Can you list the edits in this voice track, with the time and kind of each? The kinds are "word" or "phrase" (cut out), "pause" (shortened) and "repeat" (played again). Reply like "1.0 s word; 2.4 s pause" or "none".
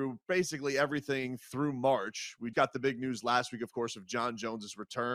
2.5 s word